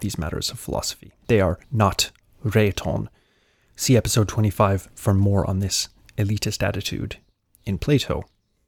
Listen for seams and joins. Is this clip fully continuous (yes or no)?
no